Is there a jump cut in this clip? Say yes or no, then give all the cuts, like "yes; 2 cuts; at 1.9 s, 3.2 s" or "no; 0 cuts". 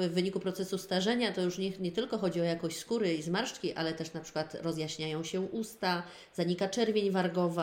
no; 0 cuts